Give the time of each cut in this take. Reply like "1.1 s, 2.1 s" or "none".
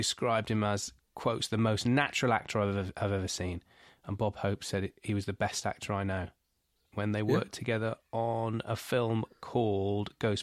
none